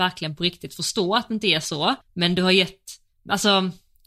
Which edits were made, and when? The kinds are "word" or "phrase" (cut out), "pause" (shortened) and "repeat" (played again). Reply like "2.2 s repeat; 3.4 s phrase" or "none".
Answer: 2.0 s pause; 3.1 s pause